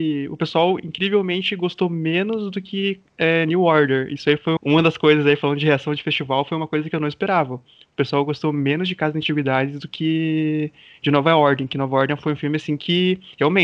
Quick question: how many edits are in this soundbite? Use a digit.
1